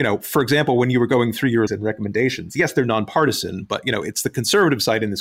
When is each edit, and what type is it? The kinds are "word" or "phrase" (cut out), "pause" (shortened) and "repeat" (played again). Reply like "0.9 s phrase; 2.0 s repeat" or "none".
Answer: 1.7 s phrase